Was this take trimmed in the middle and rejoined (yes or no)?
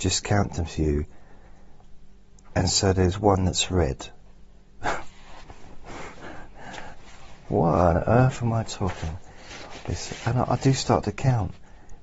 no